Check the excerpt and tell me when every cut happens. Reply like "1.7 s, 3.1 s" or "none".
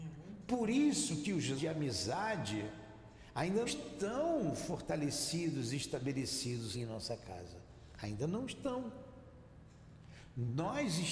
1.6 s, 3.7 s, 6.7 s